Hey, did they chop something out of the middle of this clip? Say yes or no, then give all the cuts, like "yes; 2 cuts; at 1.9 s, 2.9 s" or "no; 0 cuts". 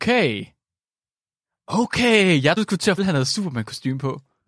yes; 2 cuts; at 2.6 s, 3.0 s